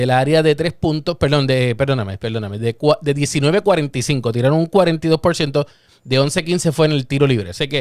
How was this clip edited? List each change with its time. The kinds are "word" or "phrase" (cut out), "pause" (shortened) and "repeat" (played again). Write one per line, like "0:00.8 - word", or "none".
none